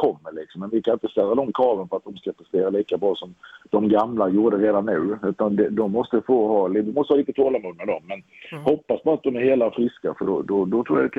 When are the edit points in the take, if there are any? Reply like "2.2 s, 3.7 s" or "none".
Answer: none